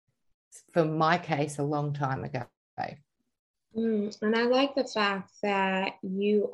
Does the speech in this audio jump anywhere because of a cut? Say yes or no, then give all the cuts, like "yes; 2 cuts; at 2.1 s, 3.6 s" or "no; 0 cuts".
no; 0 cuts